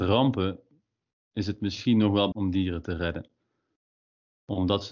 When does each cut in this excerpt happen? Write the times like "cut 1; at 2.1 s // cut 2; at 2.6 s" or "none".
cut 1; at 2.3 s